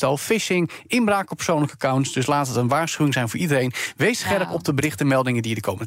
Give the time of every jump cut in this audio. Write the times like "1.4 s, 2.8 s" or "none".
none